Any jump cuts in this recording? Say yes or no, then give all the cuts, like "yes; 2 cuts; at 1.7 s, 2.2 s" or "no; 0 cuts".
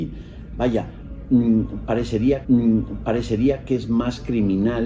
yes; 1 cut; at 2.4 s